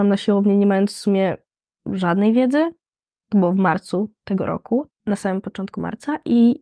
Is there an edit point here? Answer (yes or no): yes